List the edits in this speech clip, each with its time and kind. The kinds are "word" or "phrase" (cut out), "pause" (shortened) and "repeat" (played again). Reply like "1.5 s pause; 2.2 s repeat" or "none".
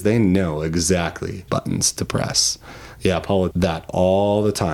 1.5 s word; 3.5 s phrase